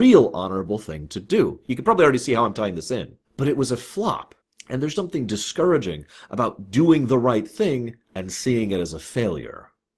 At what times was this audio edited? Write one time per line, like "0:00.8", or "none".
0:03.2
0:04.4
0:04.9
0:08.0

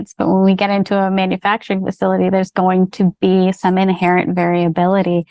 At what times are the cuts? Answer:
none

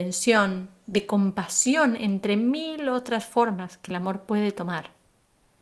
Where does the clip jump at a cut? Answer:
none

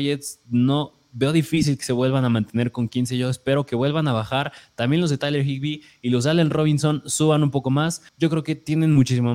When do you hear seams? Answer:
0:08.1

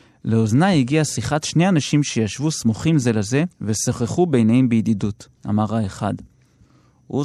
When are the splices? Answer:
0:03.5
0:05.4

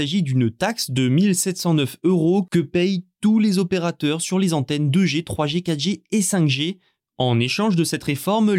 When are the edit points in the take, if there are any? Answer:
none

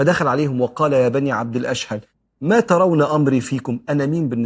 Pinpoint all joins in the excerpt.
none

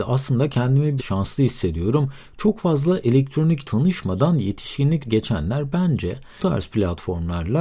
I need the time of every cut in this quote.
0:01.0
0:03.6
0:05.1
0:06.4

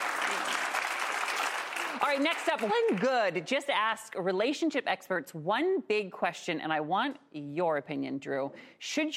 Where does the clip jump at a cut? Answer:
0:02.7

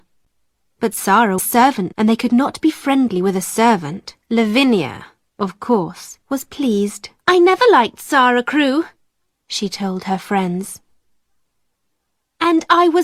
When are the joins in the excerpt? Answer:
0:01.4
0:01.9
0:04.2
0:06.2
0:07.2
0:09.3

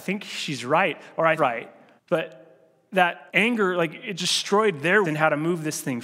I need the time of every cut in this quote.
0:01.4
0:02.0
0:03.3
0:04.2
0:05.0

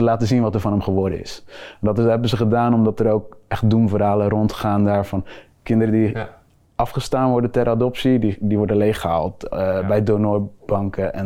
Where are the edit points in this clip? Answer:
none

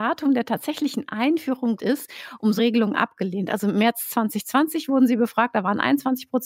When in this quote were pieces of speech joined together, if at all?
0:01.8
0:02.6

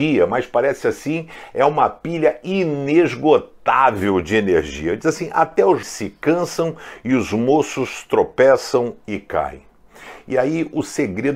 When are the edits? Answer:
0:05.8

